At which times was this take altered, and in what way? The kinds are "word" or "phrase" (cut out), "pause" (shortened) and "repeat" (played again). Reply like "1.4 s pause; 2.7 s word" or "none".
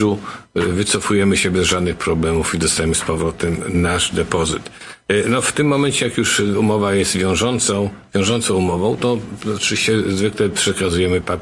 none